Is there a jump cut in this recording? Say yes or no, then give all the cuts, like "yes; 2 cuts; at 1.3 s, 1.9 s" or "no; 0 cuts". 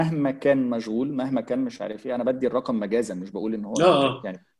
no; 0 cuts